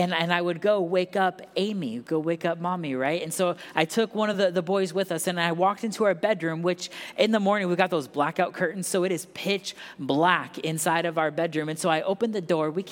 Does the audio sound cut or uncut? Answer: uncut